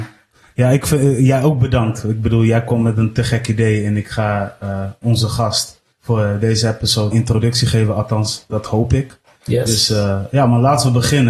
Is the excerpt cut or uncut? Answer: cut